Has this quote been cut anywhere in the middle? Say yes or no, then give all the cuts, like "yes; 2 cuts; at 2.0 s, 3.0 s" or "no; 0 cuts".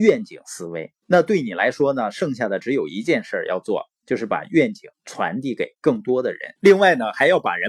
yes; 3 cuts; at 1.0 s, 4.9 s, 6.6 s